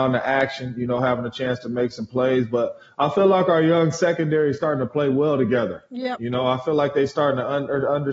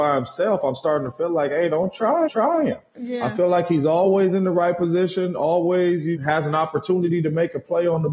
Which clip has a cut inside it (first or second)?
second